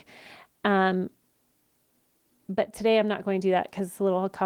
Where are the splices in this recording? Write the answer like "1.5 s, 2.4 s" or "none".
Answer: none